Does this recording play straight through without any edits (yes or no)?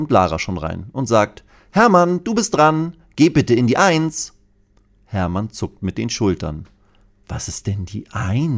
yes